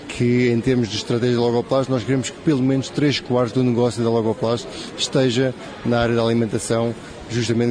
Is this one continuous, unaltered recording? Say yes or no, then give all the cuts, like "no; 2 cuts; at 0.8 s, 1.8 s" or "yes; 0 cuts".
yes; 0 cuts